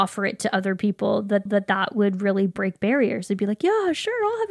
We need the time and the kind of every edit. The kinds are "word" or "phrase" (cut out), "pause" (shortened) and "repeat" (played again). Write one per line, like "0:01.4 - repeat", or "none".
0:01.5 - repeat